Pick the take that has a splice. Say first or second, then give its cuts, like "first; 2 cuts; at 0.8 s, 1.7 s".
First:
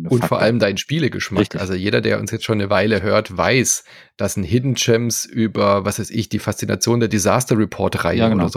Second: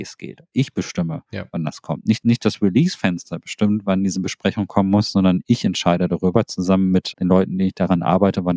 second; 2 cuts; at 2.2 s, 7.1 s